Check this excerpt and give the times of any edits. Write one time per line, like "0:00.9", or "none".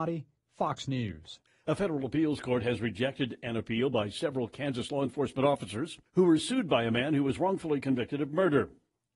0:01.5
0:06.1